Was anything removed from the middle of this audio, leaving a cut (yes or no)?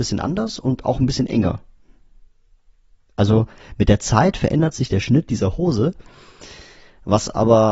no